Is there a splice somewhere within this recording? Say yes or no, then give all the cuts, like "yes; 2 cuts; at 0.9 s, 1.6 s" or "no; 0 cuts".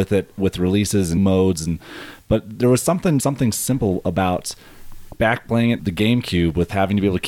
yes; 3 cuts; at 1.2 s, 3.2 s, 5.8 s